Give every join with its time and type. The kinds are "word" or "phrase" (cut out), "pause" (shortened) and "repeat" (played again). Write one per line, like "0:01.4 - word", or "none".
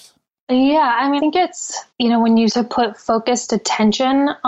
0:01.2 - word
0:01.9 - pause
0:02.5 - word